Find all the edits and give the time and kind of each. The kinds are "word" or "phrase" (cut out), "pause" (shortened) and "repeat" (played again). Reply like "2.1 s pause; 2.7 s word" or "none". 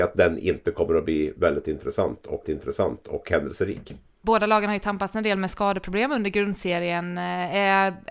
2.4 s repeat